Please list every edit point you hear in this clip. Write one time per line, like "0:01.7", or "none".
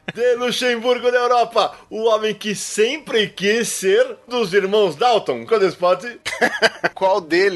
0:04.3
0:05.5